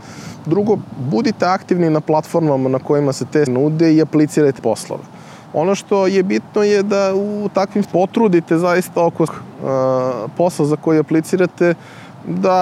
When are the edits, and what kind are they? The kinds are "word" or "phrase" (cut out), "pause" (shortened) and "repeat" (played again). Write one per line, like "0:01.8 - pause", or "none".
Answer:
0:03.5 - word
0:04.6 - word
0:07.8 - phrase
0:09.3 - word

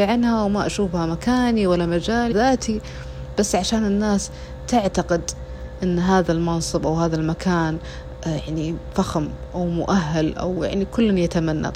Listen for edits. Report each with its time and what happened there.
0:02.3 - phrase

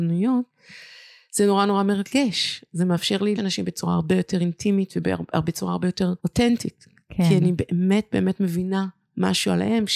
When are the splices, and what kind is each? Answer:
0:03.4 - word
0:06.2 - pause

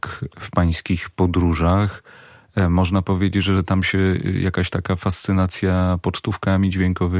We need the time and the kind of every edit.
none

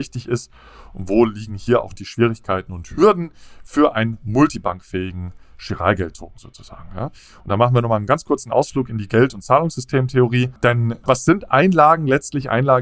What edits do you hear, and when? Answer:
none

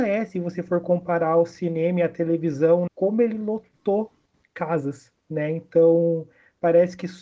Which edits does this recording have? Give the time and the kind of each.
0:02.9 - word
0:05.2 - pause

